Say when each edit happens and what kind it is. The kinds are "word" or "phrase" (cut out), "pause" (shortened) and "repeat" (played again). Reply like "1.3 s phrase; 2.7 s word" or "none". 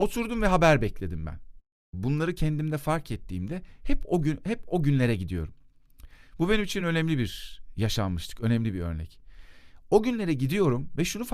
none

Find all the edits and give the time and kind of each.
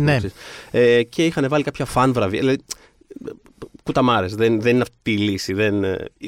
none

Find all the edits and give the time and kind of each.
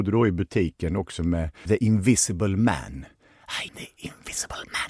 1.7 s word; 3.7 s word

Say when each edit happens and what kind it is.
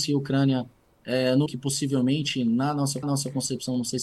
1.5 s word; 3.0 s repeat

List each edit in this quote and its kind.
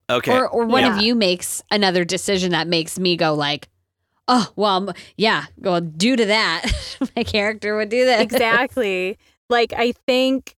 none

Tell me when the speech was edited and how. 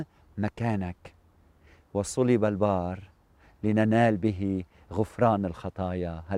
none

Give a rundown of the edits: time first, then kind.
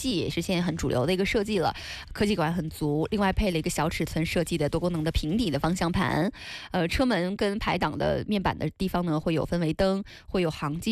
none

